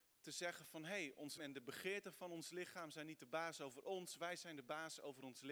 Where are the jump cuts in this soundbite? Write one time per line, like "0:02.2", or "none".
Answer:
0:01.4